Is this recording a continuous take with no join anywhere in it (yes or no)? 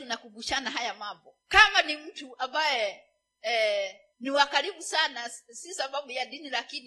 no